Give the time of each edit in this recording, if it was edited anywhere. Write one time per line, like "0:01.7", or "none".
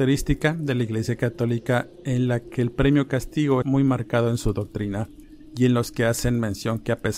0:03.6